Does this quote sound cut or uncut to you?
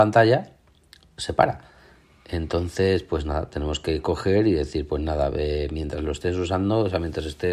uncut